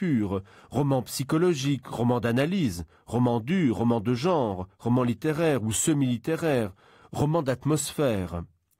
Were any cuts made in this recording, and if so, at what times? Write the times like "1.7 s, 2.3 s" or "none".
none